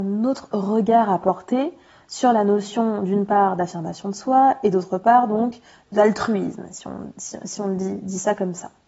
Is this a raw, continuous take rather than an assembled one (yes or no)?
yes